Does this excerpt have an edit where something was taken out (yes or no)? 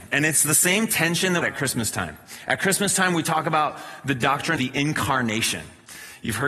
yes